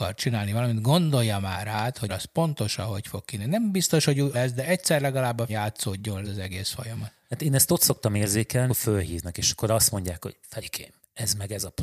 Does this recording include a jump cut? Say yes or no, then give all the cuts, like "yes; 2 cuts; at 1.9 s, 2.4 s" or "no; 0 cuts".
yes; 5 cuts; at 2.1 s, 4.3 s, 5.5 s, 6.2 s, 8.7 s